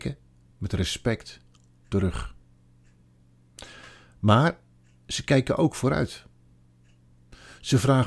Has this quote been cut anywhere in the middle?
no; 0 cuts

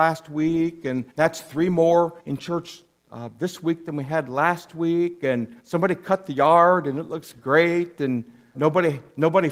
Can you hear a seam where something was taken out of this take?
yes; 4 cuts; at 1.1 s, 2.2 s, 5.6 s, 8.5 s

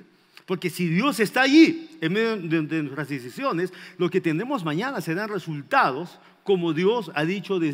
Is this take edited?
no; 0 cuts

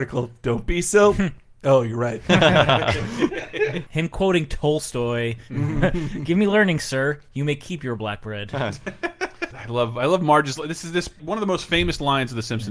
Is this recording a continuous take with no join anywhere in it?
yes; 0 cuts

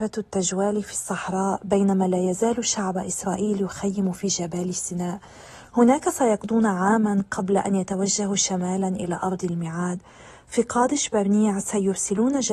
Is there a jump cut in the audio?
no; 0 cuts

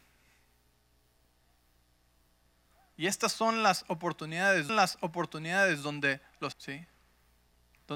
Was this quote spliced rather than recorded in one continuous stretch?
yes; 2 cuts; at 4.7 s, 6.5 s

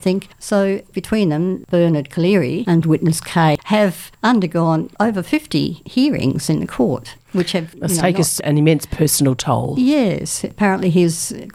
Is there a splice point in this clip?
no; 0 cuts

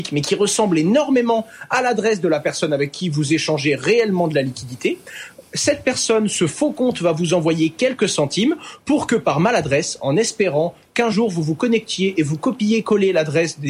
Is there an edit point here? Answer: no; 0 cuts

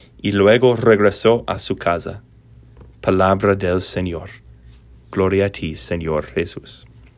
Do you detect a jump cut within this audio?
no; 0 cuts

